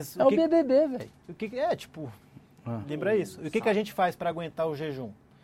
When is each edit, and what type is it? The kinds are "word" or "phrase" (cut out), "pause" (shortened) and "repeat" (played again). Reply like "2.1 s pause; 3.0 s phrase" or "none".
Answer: none